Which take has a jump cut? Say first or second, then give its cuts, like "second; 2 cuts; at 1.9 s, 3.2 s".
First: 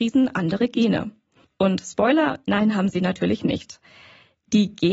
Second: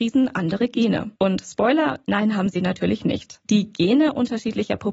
second; 2 cuts; at 1.2 s, 3.4 s